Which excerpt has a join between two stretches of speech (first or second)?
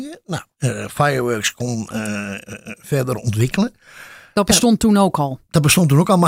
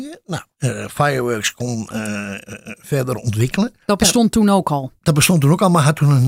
second